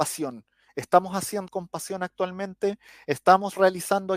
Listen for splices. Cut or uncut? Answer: cut